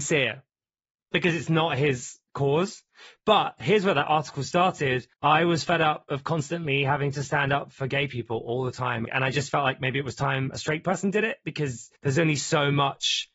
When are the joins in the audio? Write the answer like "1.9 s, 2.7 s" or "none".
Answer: 2.3 s, 5.1 s, 12.0 s